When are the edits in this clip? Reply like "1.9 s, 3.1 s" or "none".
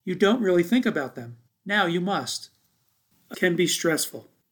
1.5 s, 3.3 s